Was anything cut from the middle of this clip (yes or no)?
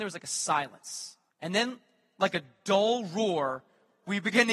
yes